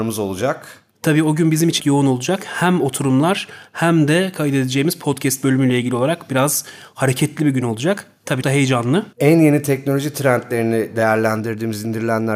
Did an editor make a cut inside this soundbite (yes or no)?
yes